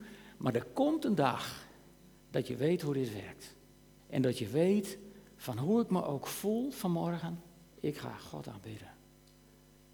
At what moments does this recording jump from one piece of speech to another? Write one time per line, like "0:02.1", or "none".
0:02.2
0:04.0
0:07.7